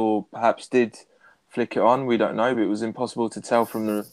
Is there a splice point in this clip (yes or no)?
no